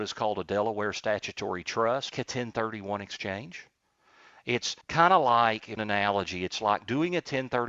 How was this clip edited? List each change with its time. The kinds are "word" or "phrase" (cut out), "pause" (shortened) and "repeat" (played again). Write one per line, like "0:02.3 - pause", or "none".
0:02.1 - phrase
0:04.8 - pause
0:05.8 - phrase